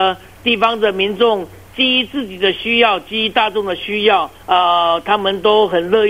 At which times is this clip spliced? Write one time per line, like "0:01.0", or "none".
0:04.3